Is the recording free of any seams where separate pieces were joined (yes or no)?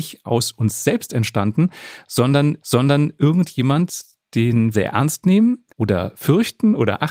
no